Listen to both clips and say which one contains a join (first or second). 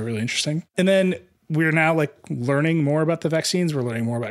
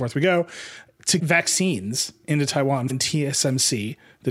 second